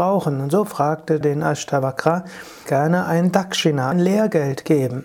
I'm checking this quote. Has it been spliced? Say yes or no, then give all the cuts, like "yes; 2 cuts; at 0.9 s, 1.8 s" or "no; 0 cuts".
yes; 3 cuts; at 1.2 s, 2.7 s, 3.9 s